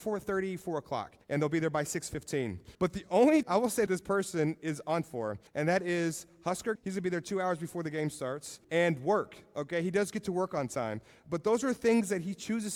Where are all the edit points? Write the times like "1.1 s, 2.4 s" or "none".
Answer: 1.2 s, 2.7 s, 3.4 s, 3.9 s, 5.0 s, 5.5 s, 6.8 s, 8.6 s